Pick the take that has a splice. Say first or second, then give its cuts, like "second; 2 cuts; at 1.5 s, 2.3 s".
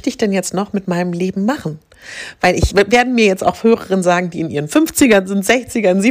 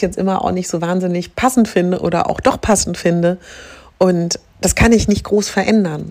first; 1 cut; at 2.7 s